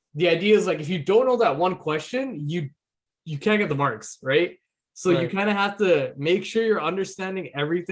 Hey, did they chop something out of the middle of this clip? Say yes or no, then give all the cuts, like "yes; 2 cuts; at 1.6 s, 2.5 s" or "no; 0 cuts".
no; 0 cuts